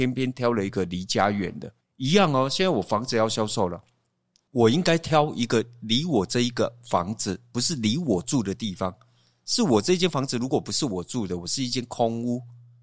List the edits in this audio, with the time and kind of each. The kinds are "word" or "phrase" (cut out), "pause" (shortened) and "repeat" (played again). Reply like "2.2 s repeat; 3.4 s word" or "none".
1.8 s pause